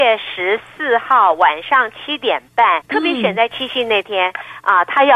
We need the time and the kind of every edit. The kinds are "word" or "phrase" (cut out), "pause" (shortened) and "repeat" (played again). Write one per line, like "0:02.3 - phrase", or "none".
0:02.8 - word